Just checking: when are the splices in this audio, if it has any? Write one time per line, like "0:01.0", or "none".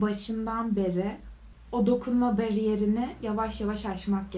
none

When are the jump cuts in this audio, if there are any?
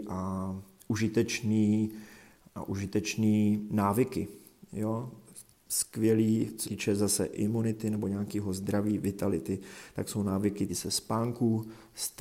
0:02.5
0:06.6
0:10.7

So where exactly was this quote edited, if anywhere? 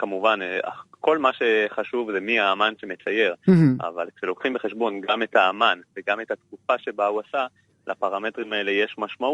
none

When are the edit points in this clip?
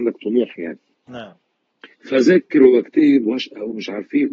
0:01.9
0:03.2

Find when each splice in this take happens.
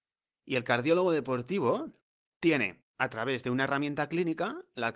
0:02.9

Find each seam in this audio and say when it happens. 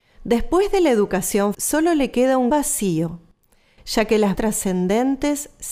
0:01.5
0:02.5
0:04.3

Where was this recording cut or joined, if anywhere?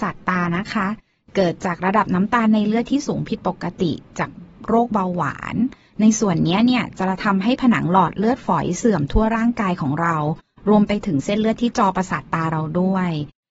none

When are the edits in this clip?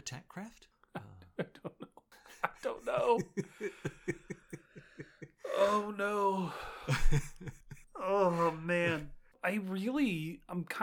none

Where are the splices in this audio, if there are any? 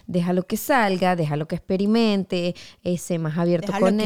none

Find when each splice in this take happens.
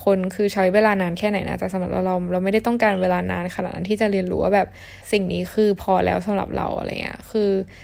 0:05.0

